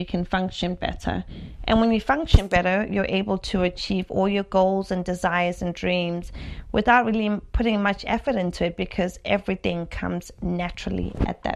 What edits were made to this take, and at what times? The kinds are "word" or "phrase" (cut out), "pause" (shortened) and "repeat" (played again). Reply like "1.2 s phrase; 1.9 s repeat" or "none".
none